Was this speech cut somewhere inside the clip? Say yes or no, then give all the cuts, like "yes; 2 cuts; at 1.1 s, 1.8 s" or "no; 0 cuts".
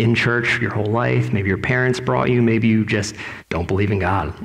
yes; 1 cut; at 3.4 s